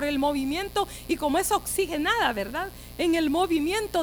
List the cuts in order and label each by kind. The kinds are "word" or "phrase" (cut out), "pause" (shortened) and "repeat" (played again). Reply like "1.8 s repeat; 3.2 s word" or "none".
none